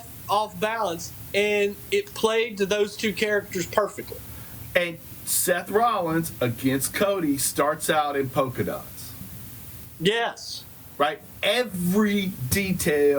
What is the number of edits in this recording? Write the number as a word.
zero